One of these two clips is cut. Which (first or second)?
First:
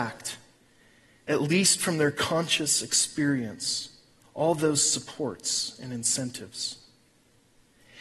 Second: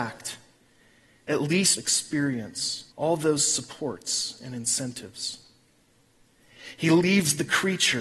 second